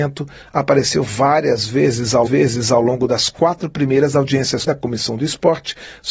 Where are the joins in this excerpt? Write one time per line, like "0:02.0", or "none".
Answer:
0:02.3
0:04.7